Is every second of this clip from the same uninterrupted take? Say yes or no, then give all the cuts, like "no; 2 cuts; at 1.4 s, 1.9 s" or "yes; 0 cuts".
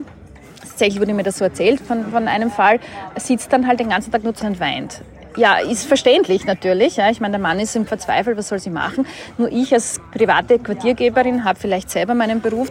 no; 2 cuts; at 4.4 s, 7.9 s